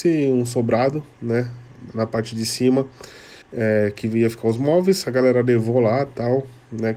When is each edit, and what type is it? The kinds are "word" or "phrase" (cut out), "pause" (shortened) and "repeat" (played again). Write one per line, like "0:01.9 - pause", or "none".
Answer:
0:03.4 - pause